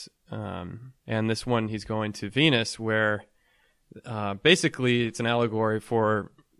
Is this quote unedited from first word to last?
no; 1 cut; at 1.0 s

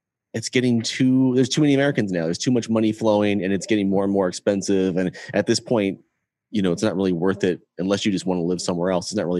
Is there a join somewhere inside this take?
no; 0 cuts

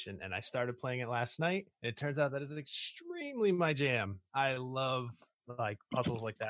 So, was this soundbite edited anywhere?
yes; 1 cut; at 1.7 s

